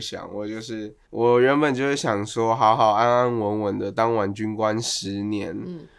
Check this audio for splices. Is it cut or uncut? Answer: cut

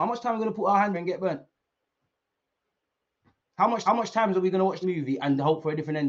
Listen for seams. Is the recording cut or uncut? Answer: cut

